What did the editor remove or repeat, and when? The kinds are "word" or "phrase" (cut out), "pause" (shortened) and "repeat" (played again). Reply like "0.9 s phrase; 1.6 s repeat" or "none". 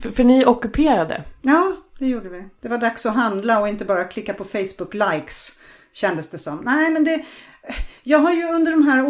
none

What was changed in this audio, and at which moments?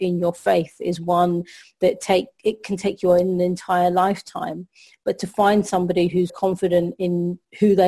6.3 s word

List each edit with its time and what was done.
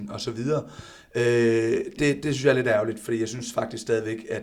2.0 s word

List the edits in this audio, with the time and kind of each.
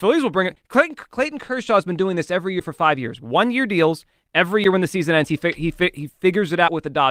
none

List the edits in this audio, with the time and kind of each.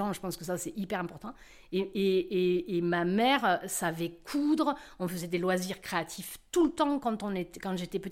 none

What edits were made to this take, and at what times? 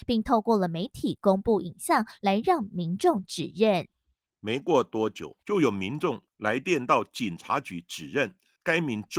5.4 s pause

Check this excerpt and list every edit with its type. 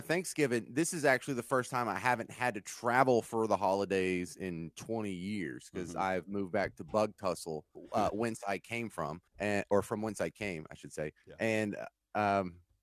7.8 s pause; 9.3 s pause

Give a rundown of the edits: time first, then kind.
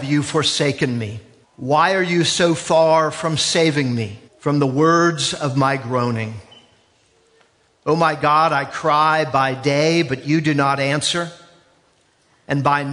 1.4 s pause; 4.3 s pause

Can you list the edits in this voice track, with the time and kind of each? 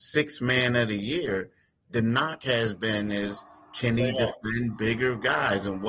none

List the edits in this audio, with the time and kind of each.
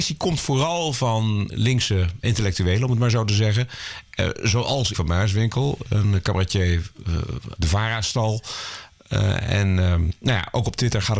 1.5 s word; 2.2 s word; 4.9 s word; 7.6 s word

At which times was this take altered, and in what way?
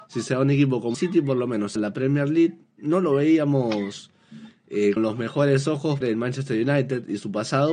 0.9 s word; 1.8 s word; 5.0 s word; 6.0 s word

